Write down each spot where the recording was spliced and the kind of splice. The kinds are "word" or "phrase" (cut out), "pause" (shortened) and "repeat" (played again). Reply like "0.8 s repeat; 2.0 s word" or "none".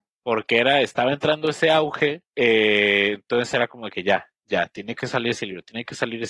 2.3 s pause